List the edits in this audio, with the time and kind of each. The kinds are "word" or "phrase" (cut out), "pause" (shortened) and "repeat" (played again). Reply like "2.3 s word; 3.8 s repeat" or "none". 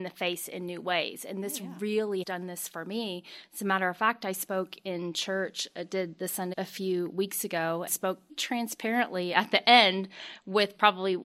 2.2 s word; 6.5 s word; 7.9 s word; 8.3 s word